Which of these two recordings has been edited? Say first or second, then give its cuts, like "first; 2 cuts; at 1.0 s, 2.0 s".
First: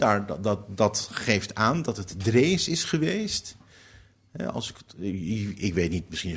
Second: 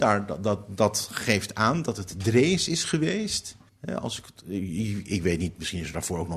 second; 1 cut; at 3.7 s